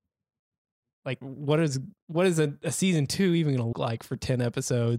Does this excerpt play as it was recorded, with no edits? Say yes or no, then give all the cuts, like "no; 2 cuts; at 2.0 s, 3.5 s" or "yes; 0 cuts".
no; 3 cuts; at 1.2 s, 2.0 s, 3.7 s